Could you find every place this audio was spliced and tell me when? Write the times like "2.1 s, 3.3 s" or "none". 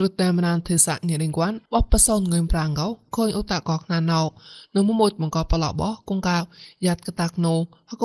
1.6 s